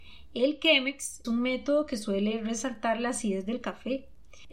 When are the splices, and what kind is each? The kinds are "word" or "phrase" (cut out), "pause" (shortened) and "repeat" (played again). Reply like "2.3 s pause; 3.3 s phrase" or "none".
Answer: 1.2 s word